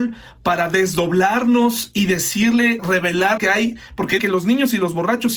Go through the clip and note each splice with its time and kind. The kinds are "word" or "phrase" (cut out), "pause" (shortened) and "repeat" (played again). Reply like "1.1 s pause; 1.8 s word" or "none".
2.8 s word; 3.4 s word; 4.2 s word